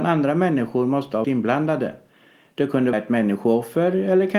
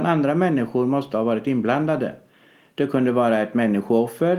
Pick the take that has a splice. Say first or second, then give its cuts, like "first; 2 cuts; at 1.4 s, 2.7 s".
first; 2 cuts; at 1.2 s, 2.9 s